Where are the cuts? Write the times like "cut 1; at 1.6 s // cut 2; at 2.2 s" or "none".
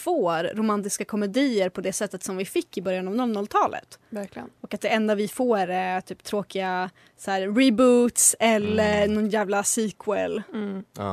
none